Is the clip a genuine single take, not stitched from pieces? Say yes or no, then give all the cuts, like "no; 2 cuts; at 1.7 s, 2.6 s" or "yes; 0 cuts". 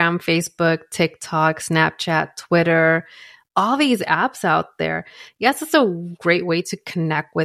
yes; 0 cuts